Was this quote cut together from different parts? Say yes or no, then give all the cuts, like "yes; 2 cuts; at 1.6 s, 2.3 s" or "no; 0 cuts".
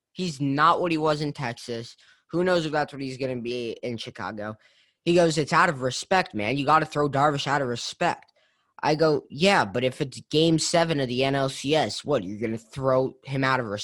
no; 0 cuts